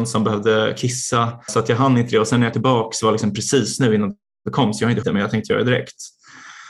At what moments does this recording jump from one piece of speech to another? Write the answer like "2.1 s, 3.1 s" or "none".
1.5 s, 2.5 s, 5.0 s